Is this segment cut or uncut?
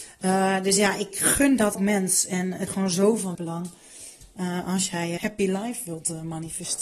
cut